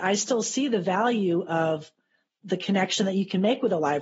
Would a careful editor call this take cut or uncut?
uncut